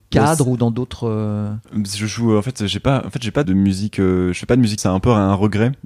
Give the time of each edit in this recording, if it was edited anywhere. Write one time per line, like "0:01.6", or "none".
0:03.4
0:04.8